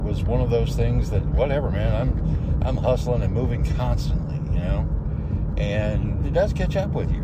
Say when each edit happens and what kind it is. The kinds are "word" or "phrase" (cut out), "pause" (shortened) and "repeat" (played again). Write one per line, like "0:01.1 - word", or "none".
0:06.2 - word

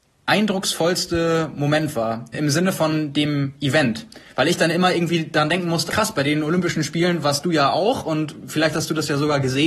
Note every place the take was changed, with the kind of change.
0:02.3 - word
0:05.9 - word

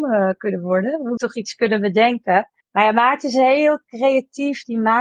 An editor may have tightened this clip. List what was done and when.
0:01.2 - word
0:02.6 - pause

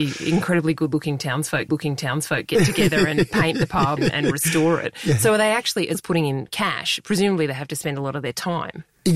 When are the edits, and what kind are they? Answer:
0:01.7 - repeat
0:04.0 - word
0:05.9 - word

